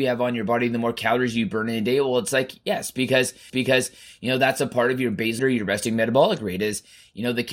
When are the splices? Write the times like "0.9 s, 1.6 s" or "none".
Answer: 3.5 s, 5.4 s